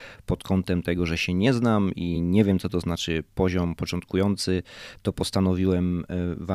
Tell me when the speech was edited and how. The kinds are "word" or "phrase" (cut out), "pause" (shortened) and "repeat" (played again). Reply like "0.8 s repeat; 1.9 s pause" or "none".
none